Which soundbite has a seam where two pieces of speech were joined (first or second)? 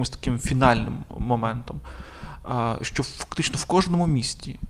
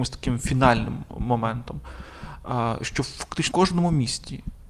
second